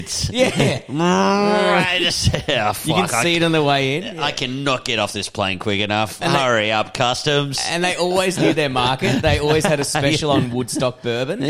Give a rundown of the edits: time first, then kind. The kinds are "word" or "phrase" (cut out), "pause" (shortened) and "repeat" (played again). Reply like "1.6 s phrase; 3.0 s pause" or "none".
none

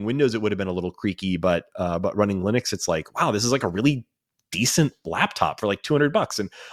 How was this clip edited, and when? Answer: none

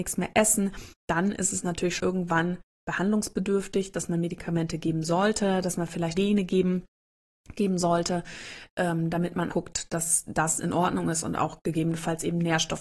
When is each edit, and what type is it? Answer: 1.0 s pause; 2.0 s word; 6.1 s phrase; 9.5 s word

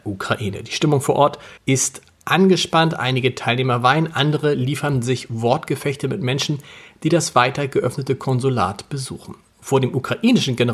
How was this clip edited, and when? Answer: 1.6 s pause

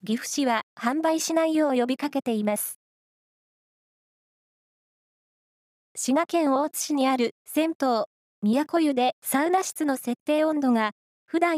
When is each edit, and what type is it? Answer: 9.1 s pause

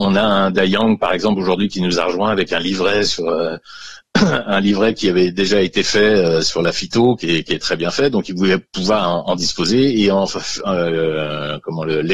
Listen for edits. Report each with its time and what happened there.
none

